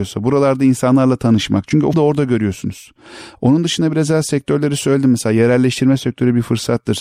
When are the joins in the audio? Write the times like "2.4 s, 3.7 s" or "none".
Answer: 1.9 s